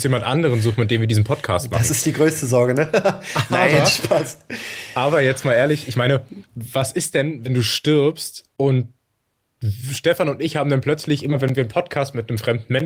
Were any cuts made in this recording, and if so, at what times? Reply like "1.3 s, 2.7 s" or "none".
6.5 s, 8.5 s